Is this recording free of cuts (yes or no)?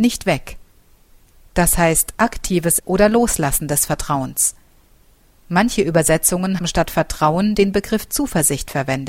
no